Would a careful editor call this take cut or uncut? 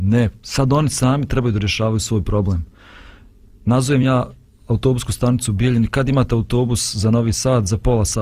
uncut